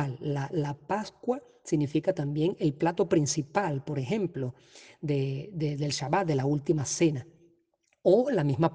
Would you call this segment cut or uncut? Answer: uncut